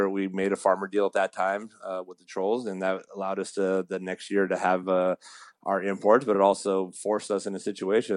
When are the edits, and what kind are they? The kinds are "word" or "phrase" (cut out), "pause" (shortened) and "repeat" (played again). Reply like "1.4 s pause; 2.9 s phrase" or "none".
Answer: none